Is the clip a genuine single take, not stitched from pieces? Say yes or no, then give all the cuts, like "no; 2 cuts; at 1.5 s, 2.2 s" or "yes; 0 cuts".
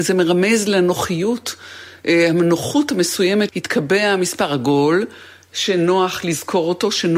no; 1 cut; at 3.5 s